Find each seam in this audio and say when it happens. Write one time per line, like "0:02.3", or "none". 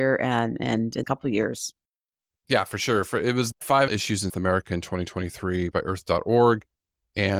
0:01.0
0:03.5
0:03.9
0:04.3
0:05.7